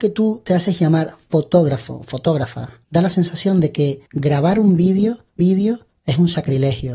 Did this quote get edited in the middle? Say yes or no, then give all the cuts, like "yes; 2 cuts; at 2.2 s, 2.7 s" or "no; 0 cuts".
yes; 3 cuts; at 2.8 s, 4.1 s, 5.4 s